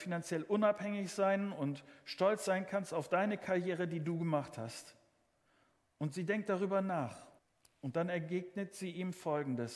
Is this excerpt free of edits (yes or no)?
no